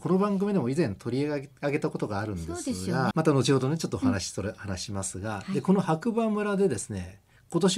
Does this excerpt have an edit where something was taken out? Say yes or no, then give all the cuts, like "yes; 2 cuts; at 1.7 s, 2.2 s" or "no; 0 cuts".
yes; 1 cut; at 3.1 s